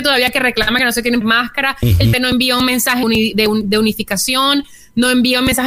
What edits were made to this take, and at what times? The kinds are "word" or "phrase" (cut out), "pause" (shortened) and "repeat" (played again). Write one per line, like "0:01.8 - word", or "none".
0:01.2 - word
0:02.1 - word
0:03.0 - word